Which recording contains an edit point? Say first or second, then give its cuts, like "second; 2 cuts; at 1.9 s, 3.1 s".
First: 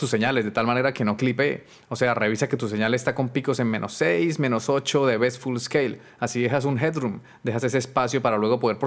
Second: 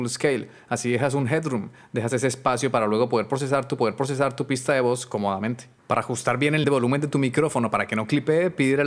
second; 3 cuts; at 3.8 s, 5.8 s, 6.6 s